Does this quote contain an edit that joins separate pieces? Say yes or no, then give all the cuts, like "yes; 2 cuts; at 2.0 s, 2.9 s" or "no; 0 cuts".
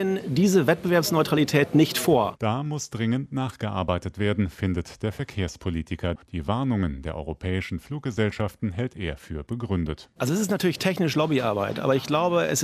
yes; 1 cut; at 6.2 s